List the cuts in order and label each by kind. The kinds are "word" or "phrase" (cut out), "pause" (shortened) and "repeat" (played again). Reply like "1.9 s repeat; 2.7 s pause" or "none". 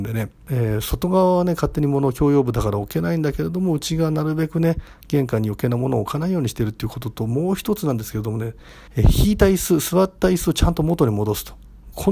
8.9 s pause